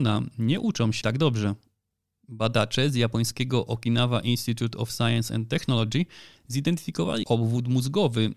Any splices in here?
yes; 2 cuts; at 1.0 s, 7.2 s

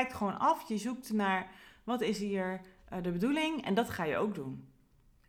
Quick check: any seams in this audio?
no; 0 cuts

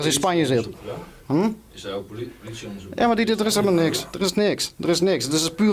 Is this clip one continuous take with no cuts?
yes; 0 cuts

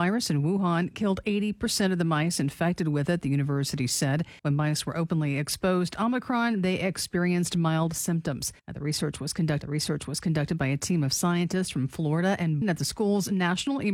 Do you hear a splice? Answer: yes; 4 cuts; at 4.4 s, 8.6 s, 9.6 s, 12.6 s

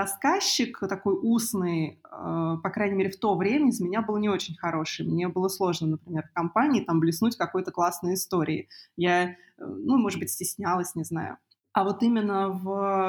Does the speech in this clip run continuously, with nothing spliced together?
yes; 0 cuts

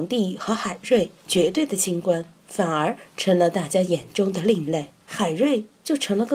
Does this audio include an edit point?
yes; 2 cuts; at 1.2 s, 5.0 s

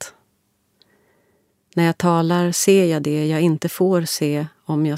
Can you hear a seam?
no; 0 cuts

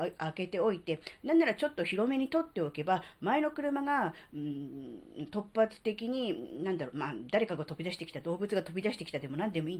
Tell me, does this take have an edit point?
no; 0 cuts

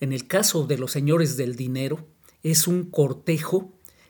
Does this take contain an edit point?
no; 0 cuts

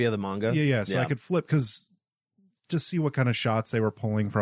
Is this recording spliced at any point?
no; 0 cuts

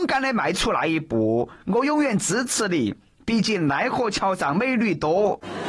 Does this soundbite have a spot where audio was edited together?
no; 0 cuts

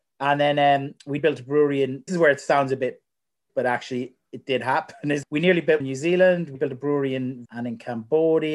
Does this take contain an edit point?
yes; 7 cuts; at 1.2 s, 2.1 s, 3.5 s, 5.2 s, 5.8 s, 6.5 s, 7.4 s

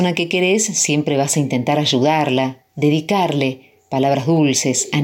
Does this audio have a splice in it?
no; 0 cuts

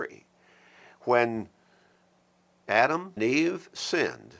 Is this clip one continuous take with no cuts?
no; 1 cut; at 3.2 s

